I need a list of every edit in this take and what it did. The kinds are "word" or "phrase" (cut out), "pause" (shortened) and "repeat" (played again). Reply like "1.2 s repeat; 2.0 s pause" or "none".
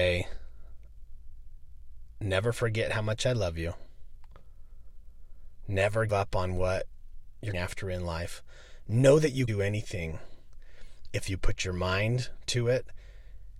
6.1 s word; 7.5 s word; 9.5 s word